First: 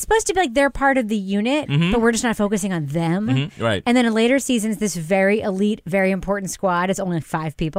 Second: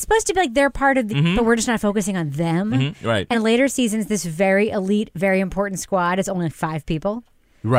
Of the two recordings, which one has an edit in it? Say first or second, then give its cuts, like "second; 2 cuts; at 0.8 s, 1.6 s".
second; 2 cuts; at 1.1 s, 3.3 s